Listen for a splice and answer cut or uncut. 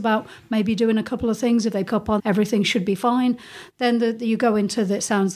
cut